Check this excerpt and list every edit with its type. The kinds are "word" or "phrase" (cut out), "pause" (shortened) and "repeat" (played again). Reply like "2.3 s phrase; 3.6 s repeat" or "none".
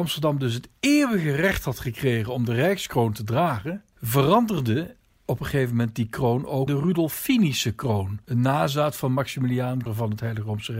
6.7 s word; 9.9 s word